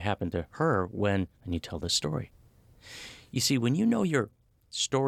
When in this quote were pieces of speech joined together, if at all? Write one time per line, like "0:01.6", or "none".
0:01.3